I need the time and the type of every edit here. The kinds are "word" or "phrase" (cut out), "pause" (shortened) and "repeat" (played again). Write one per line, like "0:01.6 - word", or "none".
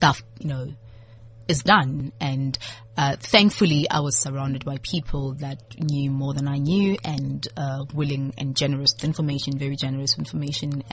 0:09.0 - phrase